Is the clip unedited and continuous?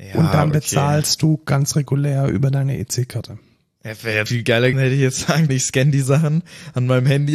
no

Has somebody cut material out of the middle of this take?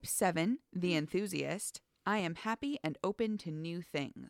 no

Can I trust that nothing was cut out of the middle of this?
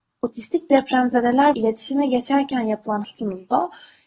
no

